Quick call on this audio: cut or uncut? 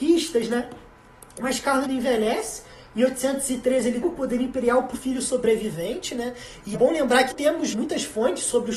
cut